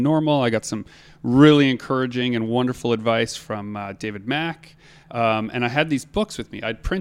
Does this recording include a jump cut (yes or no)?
no